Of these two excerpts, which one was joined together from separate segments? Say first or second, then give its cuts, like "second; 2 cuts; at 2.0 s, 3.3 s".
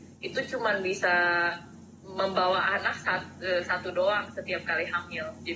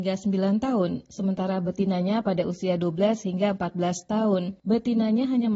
second; 1 cut; at 4.6 s